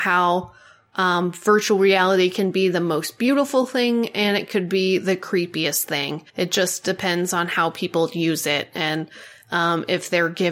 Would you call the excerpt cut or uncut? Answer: cut